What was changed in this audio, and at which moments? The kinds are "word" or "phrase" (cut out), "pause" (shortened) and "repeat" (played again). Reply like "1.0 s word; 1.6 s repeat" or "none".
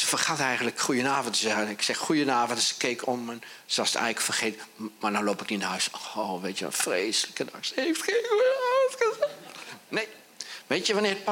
none